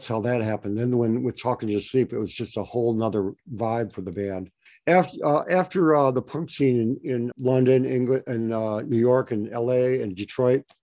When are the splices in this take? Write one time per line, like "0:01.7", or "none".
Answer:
0:04.7
0:07.3